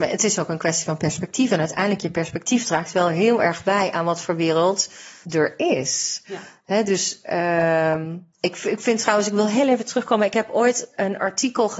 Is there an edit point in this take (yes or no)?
yes